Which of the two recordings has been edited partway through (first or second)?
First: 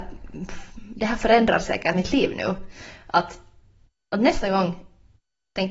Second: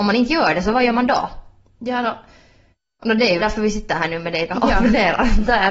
second